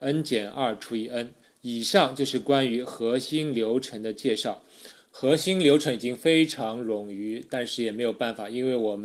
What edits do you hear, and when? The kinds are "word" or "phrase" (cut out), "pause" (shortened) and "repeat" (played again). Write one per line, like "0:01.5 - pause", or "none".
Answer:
0:01.4 - pause